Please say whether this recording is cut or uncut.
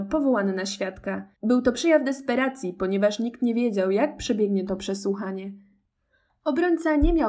cut